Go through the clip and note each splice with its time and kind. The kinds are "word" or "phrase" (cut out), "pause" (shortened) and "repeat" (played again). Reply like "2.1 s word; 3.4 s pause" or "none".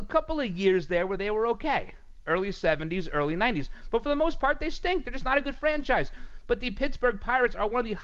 none